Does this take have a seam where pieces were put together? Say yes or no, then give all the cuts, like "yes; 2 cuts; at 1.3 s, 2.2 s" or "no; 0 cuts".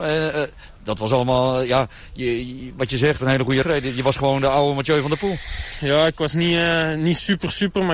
yes; 2 cuts; at 3.2 s, 3.6 s